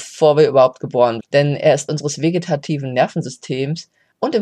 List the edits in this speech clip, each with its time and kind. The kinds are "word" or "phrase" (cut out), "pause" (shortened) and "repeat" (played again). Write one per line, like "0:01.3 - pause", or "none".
0:01.2 - word
0:01.9 - word